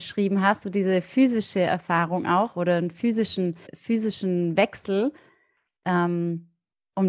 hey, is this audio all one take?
no; 1 cut; at 3.7 s

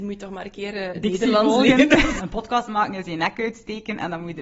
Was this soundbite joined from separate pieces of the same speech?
no; 0 cuts

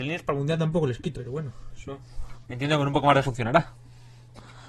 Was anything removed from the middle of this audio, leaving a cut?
yes; 3 cuts; at 1.1 s, 2.4 s, 3.2 s

